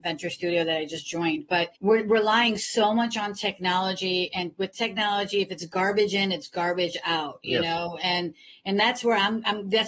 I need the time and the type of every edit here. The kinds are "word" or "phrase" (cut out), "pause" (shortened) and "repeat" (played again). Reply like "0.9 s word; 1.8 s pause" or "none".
1.8 s pause

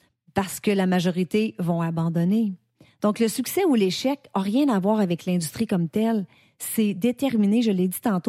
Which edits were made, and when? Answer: none

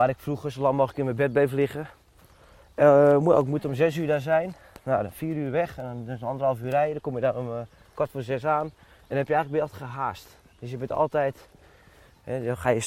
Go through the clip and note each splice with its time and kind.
none

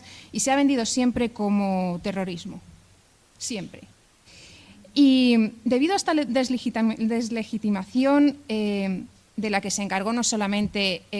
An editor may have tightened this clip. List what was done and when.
none

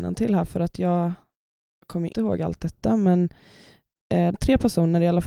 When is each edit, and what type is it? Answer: 2.1 s word; 4.3 s word

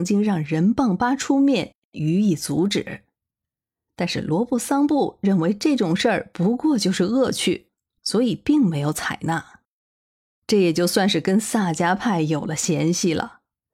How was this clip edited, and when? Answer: none

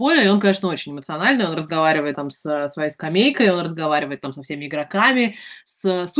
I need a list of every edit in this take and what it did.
2.1 s word

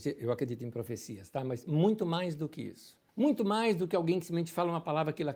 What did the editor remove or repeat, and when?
3.1 s pause

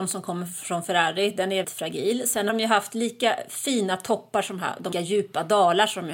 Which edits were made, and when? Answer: 1.6 s word; 2.5 s word; 4.9 s phrase

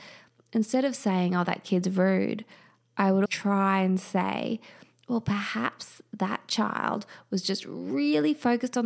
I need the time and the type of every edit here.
3.3 s word

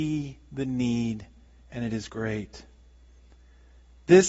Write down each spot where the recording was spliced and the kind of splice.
none

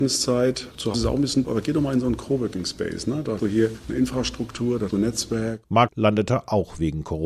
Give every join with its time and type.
0.9 s word; 1.4 s word; 3.4 s word; 4.9 s word; 5.9 s word

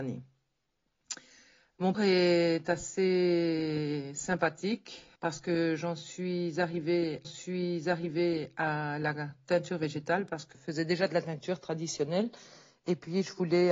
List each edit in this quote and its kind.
1.9 s word; 5.2 s pause; 7.2 s repeat; 10.5 s word

